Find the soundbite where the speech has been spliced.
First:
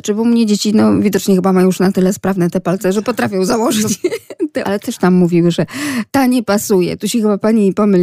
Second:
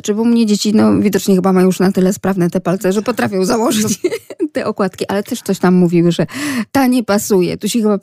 first; 2 cuts; at 4.6 s, 5.0 s

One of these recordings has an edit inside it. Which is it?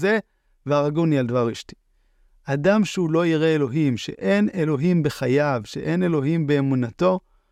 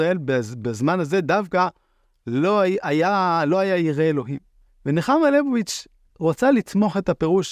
second; 1 cut; at 4.7 s

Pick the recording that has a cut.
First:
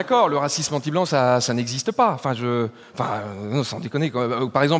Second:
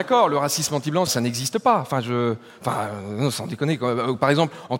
second; 1 cut; at 1.1 s

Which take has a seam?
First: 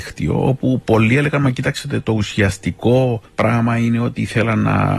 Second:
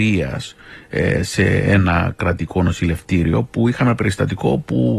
first; 1 cut; at 3.3 s

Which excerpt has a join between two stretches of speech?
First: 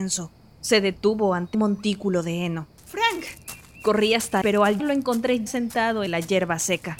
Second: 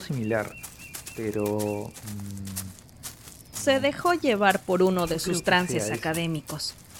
first; 5 cuts; at 1.5 s, 4.4 s, 4.8 s, 5.5 s, 6.1 s

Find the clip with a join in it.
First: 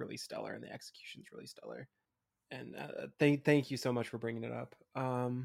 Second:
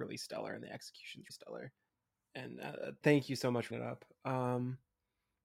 second; 3 cuts; at 1.3 s, 3.0 s, 3.7 s

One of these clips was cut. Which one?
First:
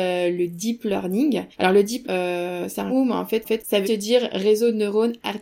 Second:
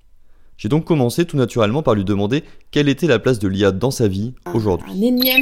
first; 5 cuts; at 1.5 s, 2.0 s, 2.9 s, 3.4 s, 3.8 s

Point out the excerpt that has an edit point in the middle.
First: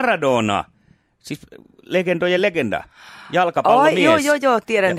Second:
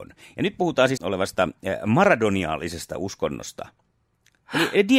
second; 1 cut; at 1.0 s

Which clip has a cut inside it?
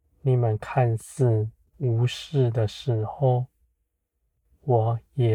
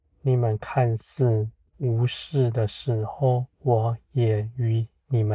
second; 1 cut; at 3.5 s

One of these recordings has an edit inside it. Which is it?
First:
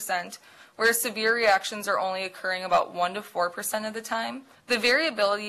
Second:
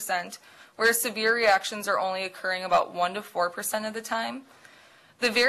first; 1 cut; at 4.5 s

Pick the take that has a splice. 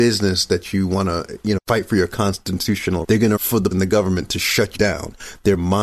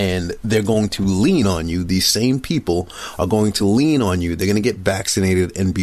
first; 5 cuts; at 1.6 s, 3.0 s, 3.4 s, 3.7 s, 4.7 s

